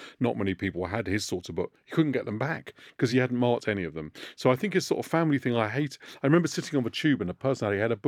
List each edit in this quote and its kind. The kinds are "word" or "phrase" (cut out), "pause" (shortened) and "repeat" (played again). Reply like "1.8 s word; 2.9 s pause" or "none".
none